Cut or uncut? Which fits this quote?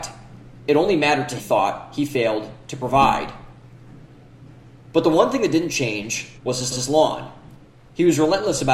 cut